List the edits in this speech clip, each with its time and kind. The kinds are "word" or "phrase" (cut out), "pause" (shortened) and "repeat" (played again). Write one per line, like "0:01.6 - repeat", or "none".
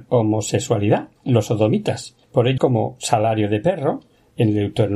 0:01.2 - pause
0:02.2 - pause
0:02.6 - phrase